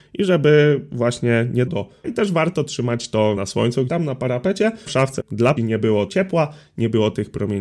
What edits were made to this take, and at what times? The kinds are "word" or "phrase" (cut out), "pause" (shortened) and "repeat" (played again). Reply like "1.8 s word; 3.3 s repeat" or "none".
1.7 s word; 2.0 s word; 3.4 s word; 3.9 s word; 4.9 s word; 5.2 s word; 5.6 s word; 6.1 s word